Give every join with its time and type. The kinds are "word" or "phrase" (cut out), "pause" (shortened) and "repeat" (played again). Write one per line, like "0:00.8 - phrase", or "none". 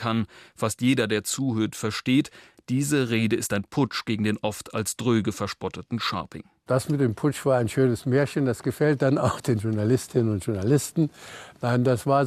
none